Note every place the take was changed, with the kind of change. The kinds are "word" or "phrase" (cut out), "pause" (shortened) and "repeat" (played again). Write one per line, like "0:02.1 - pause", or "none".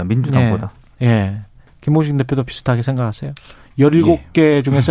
none